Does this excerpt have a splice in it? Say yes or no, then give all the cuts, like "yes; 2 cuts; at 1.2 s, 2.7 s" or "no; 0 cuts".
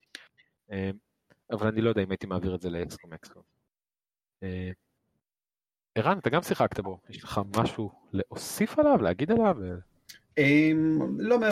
no; 0 cuts